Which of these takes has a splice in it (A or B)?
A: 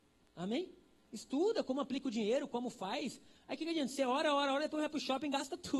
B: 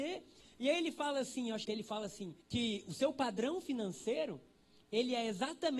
B